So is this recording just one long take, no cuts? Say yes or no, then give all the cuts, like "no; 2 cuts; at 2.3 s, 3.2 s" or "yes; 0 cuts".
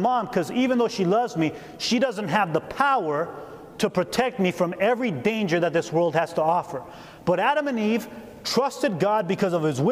yes; 0 cuts